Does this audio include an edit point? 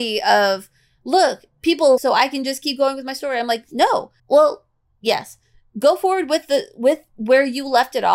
yes; 2 cuts; at 2.0 s, 4.2 s

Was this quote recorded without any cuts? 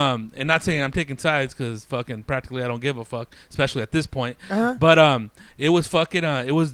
no; 1 cut; at 5.5 s

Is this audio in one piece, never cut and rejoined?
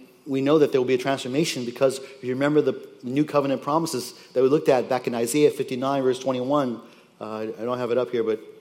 yes; 0 cuts

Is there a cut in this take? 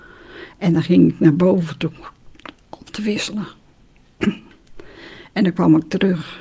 no; 0 cuts

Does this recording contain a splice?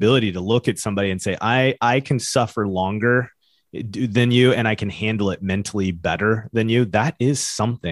no; 0 cuts

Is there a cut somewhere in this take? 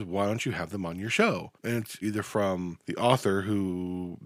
yes; 3 cuts; at 1.5 s, 2.0 s, 2.8 s

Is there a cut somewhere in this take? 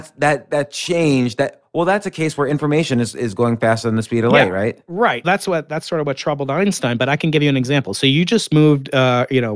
yes; 1 cut; at 5.2 s

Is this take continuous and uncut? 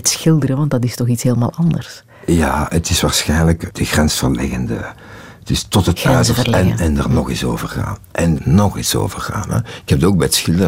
no; 2 cuts; at 3.7 s, 8.4 s

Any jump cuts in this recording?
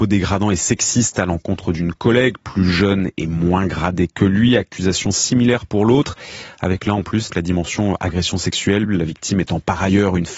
yes; 1 cut; at 7.3 s

